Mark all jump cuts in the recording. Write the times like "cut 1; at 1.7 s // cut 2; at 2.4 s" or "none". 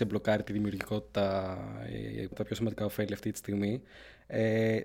cut 1; at 2.3 s